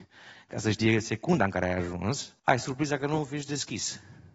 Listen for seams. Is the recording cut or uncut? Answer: cut